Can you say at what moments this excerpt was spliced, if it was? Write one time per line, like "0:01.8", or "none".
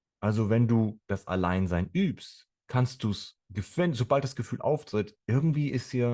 0:03.4